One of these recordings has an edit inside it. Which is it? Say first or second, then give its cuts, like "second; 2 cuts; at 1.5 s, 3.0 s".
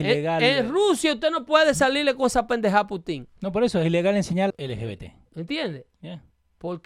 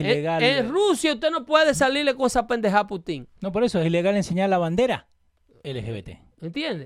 first; 1 cut; at 4.5 s